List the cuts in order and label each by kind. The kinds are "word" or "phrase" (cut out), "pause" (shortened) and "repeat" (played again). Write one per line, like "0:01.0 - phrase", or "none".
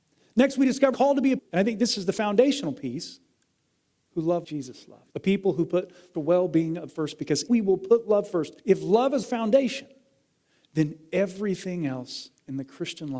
0:00.9 - phrase
0:01.4 - word
0:04.4 - word
0:05.1 - pause
0:06.1 - phrase
0:06.9 - word
0:07.5 - word
0:08.6 - pause
0:09.2 - word